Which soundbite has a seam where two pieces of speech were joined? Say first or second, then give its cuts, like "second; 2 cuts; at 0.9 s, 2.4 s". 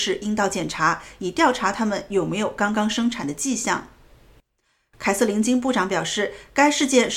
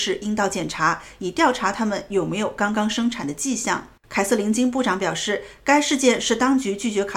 second; 1 cut; at 4.0 s